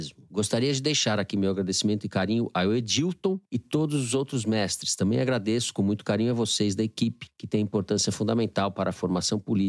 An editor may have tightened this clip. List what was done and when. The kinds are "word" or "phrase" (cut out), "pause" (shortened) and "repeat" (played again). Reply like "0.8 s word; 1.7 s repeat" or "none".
none